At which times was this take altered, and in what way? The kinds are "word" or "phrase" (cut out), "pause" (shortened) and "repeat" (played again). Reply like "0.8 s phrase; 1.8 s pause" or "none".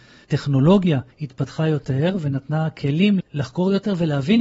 1.1 s pause; 3.2 s word